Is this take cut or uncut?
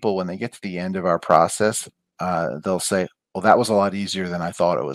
uncut